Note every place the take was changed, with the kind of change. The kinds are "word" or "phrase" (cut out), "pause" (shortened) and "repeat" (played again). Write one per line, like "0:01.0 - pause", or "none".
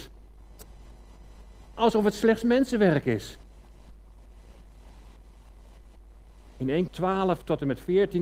0:06.9 - word